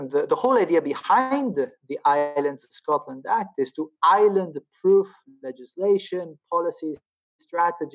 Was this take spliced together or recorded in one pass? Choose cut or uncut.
uncut